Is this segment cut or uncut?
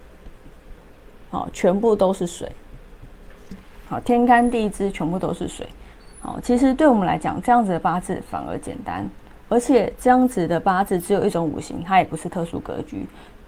uncut